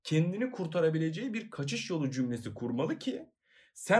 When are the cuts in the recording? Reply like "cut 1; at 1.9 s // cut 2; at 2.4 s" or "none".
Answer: none